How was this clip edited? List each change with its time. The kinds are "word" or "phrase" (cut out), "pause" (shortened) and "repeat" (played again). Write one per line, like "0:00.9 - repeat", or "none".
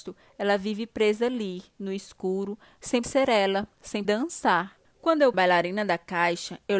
0:03.0 - word
0:04.0 - word
0:04.8 - pause
0:05.3 - phrase